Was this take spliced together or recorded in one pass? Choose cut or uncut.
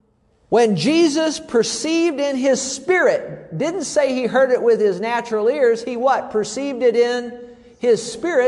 uncut